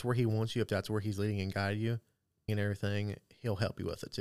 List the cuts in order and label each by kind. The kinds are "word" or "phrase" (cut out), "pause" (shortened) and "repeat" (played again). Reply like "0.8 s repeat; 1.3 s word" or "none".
2.5 s word